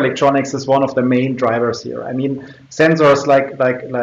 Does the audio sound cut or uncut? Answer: uncut